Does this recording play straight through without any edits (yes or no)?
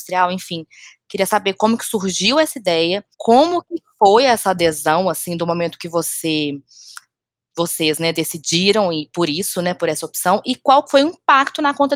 no